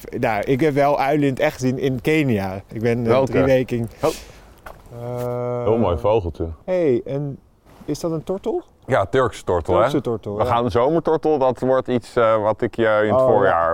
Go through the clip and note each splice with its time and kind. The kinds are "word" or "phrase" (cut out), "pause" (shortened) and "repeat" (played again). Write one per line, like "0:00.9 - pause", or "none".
0:06.6 - pause

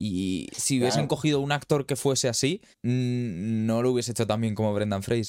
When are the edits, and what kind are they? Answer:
0:02.7 - pause

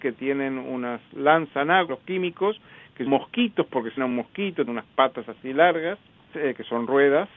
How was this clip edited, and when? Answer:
0:01.0 - word
0:01.9 - word
0:03.1 - word
0:04.0 - word
0:04.7 - word
0:06.3 - word

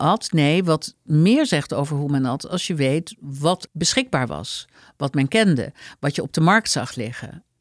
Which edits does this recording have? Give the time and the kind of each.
0:03.7 - word

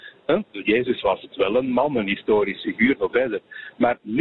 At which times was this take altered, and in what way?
0:01.3 - word
0:02.9 - word

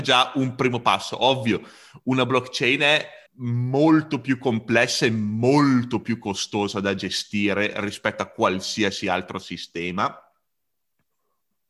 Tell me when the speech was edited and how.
0:03.3 - pause

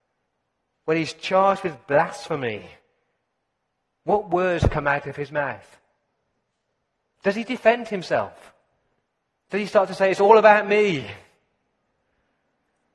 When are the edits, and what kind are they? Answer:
0:09.1 - pause

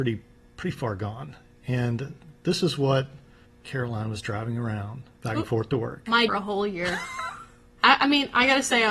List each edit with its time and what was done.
0:03.5 - pause
0:05.1 - pause
0:06.3 - phrase

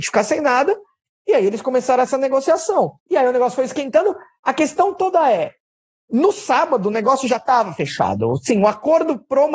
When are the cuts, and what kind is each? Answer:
0:03.0 - pause

